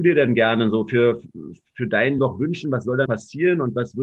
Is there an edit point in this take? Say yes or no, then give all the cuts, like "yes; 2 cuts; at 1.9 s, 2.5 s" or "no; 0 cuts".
yes; 2 cuts; at 2.2 s, 3.1 s